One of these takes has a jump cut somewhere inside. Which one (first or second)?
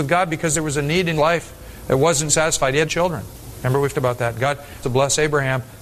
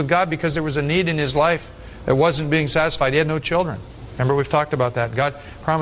first